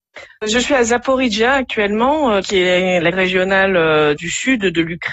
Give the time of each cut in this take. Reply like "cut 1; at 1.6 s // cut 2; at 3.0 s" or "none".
cut 1; at 2.4 s // cut 2; at 3.1 s // cut 3; at 4.2 s